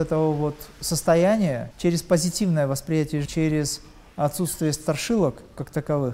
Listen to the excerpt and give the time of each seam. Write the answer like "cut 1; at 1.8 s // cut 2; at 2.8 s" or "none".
cut 1; at 1.7 s // cut 2; at 3.3 s